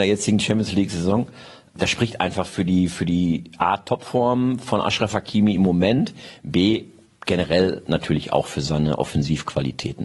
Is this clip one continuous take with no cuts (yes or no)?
yes